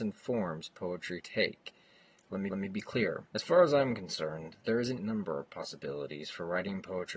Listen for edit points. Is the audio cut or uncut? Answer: cut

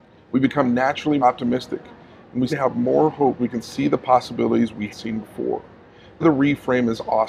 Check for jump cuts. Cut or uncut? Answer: cut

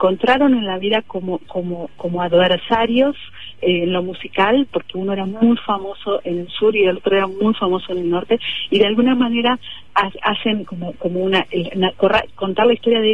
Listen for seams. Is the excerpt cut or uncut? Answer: uncut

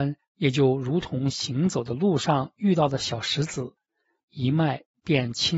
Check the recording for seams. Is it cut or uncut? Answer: uncut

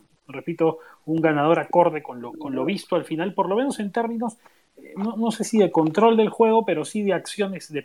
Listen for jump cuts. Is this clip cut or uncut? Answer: uncut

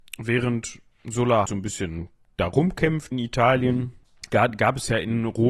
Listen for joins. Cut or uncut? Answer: cut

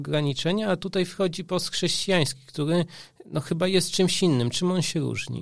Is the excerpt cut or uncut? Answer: uncut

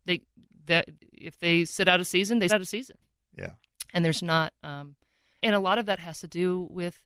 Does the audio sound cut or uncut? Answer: cut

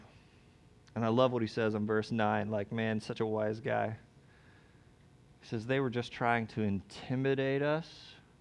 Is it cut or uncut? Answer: uncut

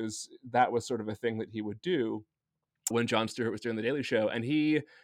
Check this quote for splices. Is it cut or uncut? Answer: cut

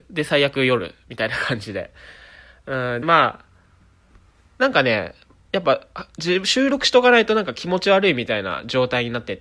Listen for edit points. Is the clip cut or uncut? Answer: cut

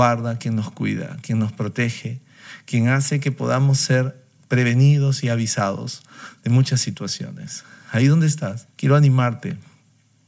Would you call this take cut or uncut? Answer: cut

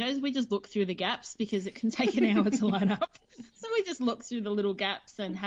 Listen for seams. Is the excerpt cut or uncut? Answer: uncut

